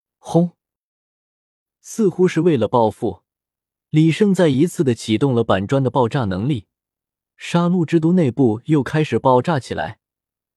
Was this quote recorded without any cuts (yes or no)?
yes